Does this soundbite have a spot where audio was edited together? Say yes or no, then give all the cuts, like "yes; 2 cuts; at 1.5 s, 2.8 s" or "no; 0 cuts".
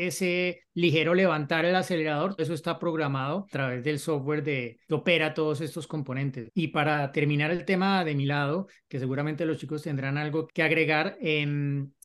yes; 5 cuts; at 2.4 s, 3.5 s, 4.8 s, 6.5 s, 10.5 s